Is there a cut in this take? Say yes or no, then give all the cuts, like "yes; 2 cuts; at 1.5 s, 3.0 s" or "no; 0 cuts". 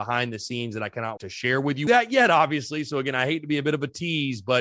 yes; 2 cuts; at 1.2 s, 1.9 s